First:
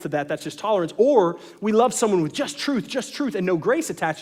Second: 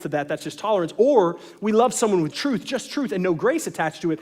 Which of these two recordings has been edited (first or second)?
second